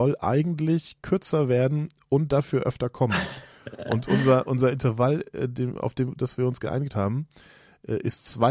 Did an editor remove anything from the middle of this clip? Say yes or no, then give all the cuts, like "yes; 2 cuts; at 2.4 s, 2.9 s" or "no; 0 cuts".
no; 0 cuts